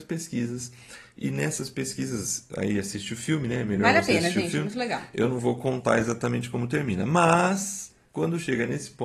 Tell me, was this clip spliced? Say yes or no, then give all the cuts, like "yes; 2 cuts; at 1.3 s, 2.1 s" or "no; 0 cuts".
no; 0 cuts